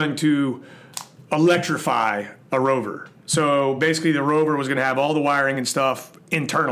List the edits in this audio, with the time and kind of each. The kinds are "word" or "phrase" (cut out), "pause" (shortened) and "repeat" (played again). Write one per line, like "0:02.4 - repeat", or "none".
none